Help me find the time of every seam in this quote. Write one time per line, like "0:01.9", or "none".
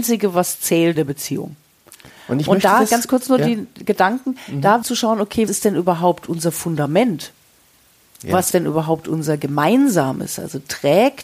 0:01.0
0:04.8
0:05.5
0:08.5

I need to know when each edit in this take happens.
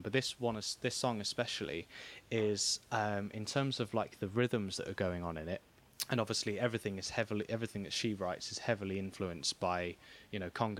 none

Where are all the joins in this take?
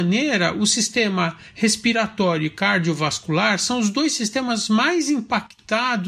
none

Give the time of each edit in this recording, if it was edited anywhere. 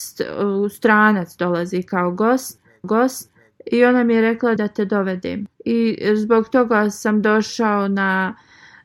0:02.8
0:04.6
0:05.5

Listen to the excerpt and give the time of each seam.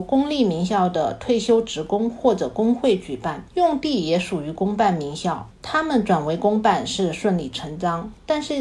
0:03.5
0:05.5

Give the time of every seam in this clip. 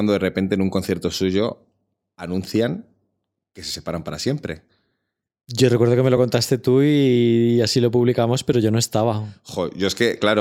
none

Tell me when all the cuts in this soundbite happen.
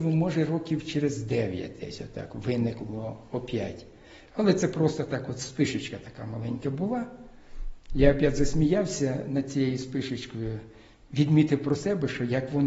none

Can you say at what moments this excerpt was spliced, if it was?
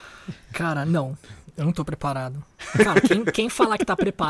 none

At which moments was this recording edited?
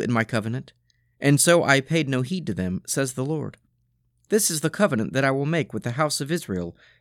none

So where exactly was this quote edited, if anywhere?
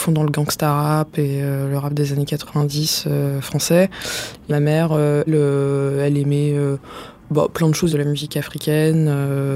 0:05.3
0:07.9

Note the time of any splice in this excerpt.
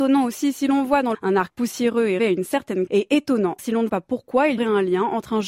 0:01.1
0:01.5
0:02.2
0:02.9
0:03.6
0:03.9
0:04.6

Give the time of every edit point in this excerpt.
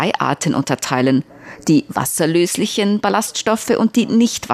none

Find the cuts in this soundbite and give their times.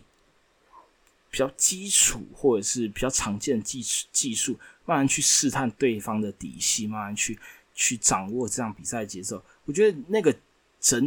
none

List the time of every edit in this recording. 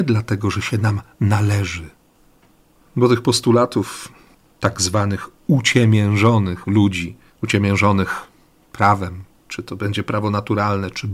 0:07.3

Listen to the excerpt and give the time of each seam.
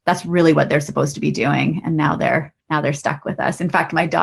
0:02.6

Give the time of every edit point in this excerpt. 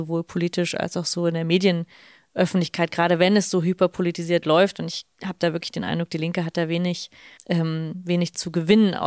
0:07.4

